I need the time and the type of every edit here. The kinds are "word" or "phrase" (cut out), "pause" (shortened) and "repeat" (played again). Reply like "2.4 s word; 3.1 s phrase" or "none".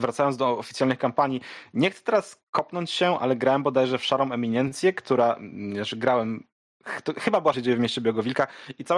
7.5 s phrase